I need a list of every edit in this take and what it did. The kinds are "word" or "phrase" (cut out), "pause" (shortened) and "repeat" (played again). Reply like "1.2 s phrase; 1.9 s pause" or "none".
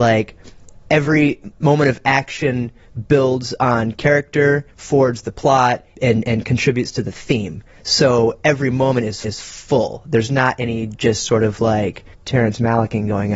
4.7 s pause; 5.9 s word; 9.2 s repeat; 12.1 s pause